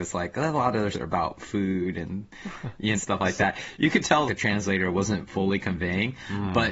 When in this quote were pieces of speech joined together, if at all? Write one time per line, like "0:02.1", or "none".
0:00.9
0:03.0
0:04.3